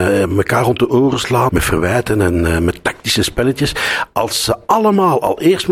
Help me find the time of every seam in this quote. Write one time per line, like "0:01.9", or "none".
0:01.5